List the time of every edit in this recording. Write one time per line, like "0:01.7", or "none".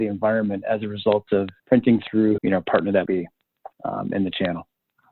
0:01.6
0:02.4
0:03.1
0:03.7